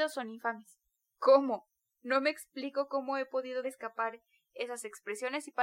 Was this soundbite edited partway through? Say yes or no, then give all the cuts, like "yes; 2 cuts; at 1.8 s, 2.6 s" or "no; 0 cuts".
yes; 1 cut; at 3.6 s